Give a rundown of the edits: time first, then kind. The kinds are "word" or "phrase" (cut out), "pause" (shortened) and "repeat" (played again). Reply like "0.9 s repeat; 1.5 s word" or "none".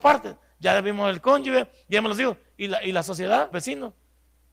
3.5 s word